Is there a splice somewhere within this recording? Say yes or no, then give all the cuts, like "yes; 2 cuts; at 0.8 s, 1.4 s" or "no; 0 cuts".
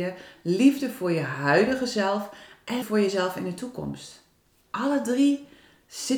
yes; 1 cut; at 2.8 s